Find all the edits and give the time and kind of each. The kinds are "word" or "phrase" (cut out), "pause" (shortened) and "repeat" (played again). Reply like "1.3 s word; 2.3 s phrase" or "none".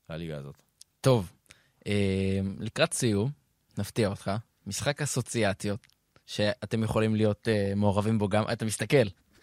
none